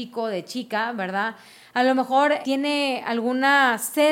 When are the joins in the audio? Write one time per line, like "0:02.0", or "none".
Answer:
0:02.4

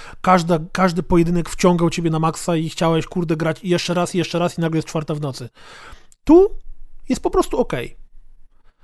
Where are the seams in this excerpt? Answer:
none

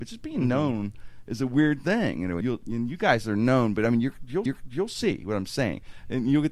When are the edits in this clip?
0:02.4
0:04.5

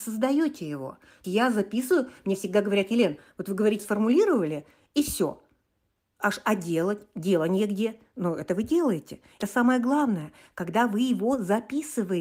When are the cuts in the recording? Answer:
0:01.2
0:03.8
0:09.4

